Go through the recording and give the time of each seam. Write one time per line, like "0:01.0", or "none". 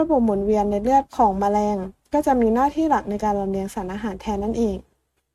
0:01.1